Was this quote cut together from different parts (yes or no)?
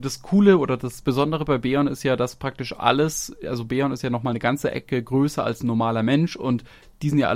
no